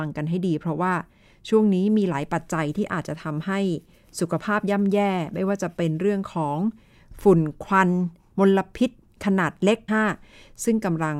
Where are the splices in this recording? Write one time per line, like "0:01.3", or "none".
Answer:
0:09.9